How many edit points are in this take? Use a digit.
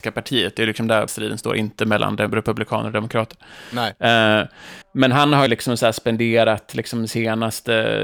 3